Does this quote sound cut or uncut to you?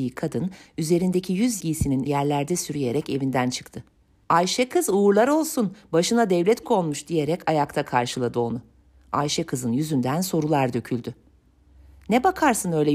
cut